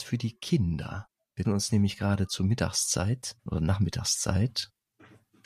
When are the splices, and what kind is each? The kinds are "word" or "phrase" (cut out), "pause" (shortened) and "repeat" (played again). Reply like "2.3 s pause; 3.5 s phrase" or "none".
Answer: 1.4 s word; 3.4 s pause

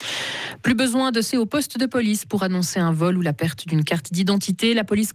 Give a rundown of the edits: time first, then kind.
1.3 s word

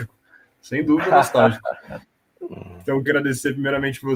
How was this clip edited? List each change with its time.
3.1 s word

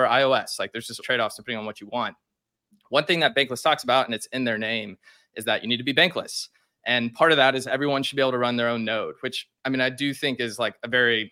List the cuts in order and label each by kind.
1.0 s word

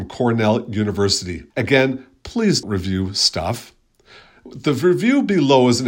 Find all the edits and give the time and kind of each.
1.5 s pause; 2.6 s word

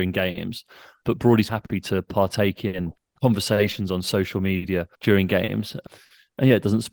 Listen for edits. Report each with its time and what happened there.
1.5 s word; 4.9 s pause

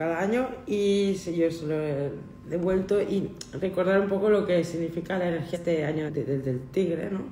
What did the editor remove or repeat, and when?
5.5 s word; 6.1 s word

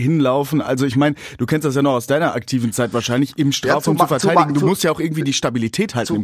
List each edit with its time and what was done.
none

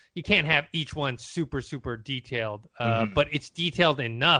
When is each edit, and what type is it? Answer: none

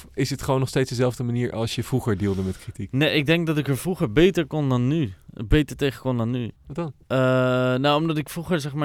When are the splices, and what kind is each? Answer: 6.6 s pause; 7.0 s pause

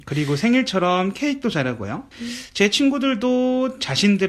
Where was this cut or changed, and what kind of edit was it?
2.1 s pause

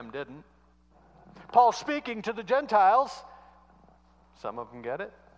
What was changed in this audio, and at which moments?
none

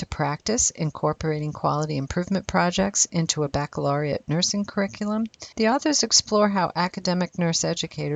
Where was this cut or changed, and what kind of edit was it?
5.5 s pause

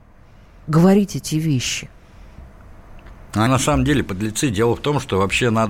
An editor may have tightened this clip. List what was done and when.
3.5 s word

